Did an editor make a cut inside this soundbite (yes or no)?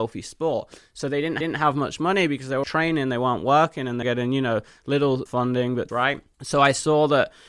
yes